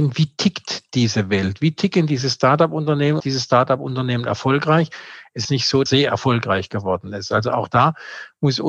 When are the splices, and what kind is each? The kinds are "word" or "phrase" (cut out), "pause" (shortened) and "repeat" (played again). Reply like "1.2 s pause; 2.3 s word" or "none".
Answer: 3.2 s phrase; 5.4 s word; 5.9 s phrase